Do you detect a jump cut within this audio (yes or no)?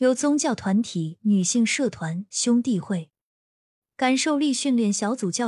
no